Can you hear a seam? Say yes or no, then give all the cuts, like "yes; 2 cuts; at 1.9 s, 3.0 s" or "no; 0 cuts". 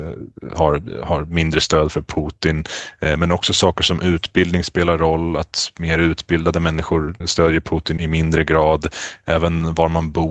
yes; 2 cuts; at 7.2 s, 8.0 s